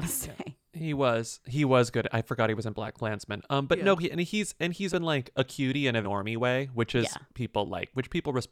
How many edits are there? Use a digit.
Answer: 2